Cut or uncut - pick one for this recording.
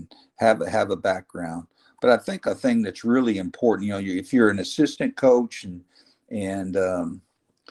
uncut